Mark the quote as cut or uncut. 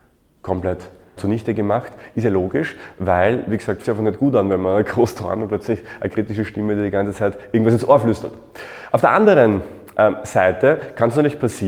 cut